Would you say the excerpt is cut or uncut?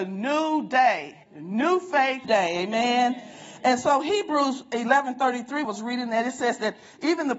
cut